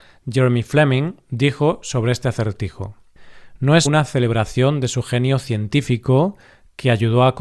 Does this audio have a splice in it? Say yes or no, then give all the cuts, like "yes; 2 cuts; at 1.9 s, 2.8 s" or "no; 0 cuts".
yes; 1 cut; at 3.9 s